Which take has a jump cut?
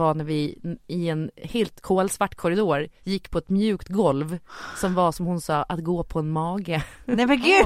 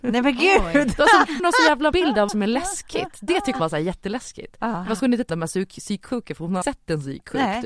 second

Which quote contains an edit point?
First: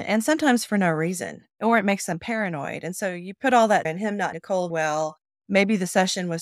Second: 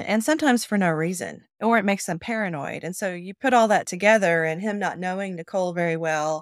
first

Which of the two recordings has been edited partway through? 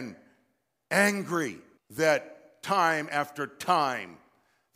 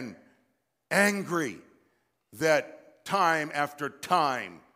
first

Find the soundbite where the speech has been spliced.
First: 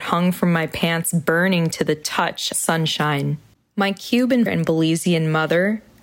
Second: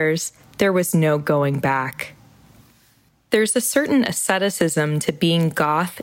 first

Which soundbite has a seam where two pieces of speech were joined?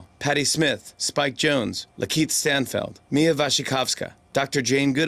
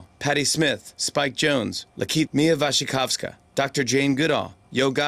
second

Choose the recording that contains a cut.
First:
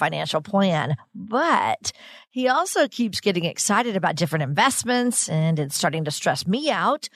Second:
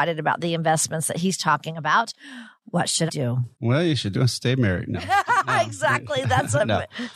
second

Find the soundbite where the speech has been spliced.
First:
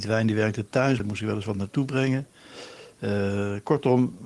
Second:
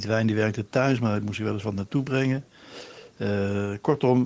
first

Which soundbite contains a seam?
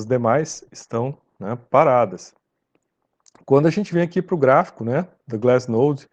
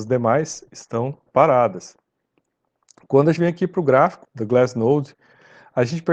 second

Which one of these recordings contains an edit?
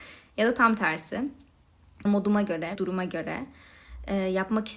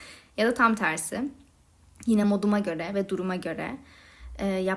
first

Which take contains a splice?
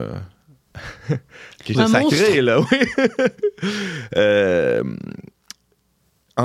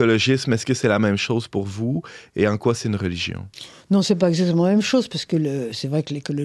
first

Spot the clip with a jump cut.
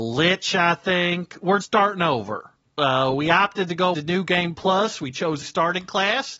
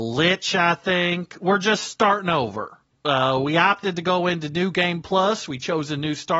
first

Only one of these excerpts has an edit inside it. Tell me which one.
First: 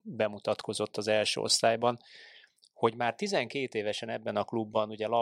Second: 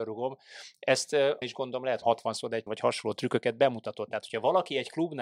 second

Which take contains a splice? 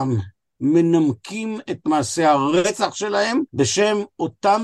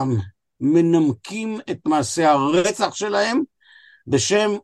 first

